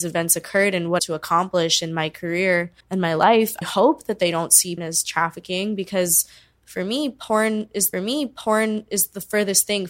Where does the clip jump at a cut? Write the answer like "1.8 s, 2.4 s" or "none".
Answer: 1.0 s, 2.8 s, 3.6 s, 4.8 s, 7.9 s